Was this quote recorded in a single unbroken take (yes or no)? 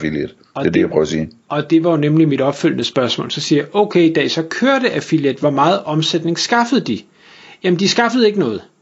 yes